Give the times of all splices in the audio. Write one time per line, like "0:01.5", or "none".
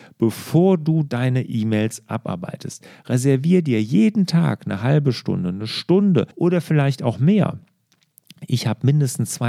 0:06.3

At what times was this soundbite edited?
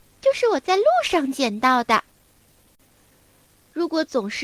none

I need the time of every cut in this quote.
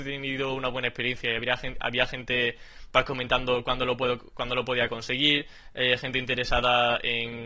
none

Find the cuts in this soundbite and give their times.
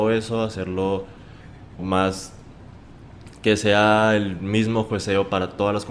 0:01.8

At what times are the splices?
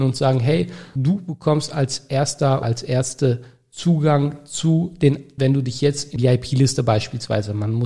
0:01.0
0:02.6
0:05.4
0:06.2

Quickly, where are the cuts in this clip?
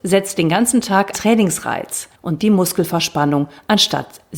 0:01.1
0:02.4

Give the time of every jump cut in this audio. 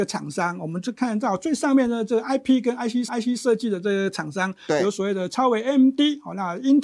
0:03.1

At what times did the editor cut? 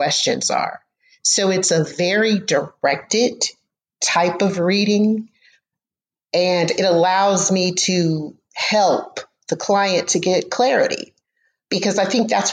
none

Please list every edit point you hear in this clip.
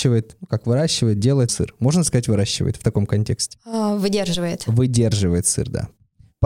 0:01.5

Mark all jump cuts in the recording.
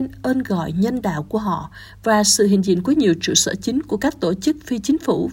none

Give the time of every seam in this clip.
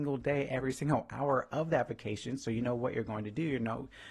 none

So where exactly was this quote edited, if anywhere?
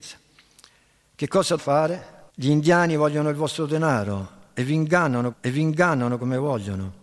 0:01.6
0:02.3
0:05.3

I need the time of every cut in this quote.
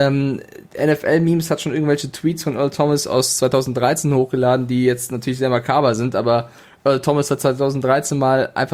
none

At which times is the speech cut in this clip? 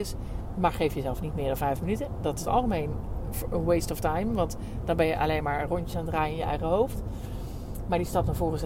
0:02.5

